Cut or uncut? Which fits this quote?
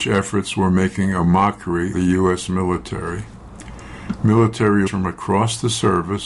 cut